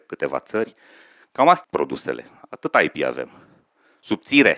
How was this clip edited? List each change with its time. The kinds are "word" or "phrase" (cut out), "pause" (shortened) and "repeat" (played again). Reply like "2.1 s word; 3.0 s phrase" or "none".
1.6 s word